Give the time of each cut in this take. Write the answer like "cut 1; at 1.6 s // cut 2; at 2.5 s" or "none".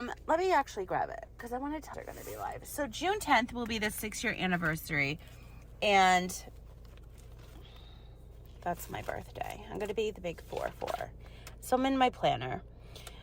cut 1; at 1.9 s